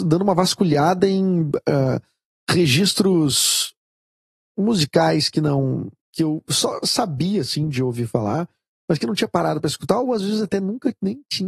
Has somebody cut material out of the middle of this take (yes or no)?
no